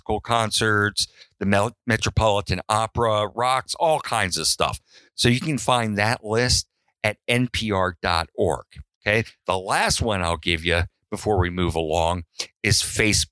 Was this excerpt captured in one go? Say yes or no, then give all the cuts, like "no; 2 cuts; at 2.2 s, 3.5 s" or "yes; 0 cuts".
yes; 0 cuts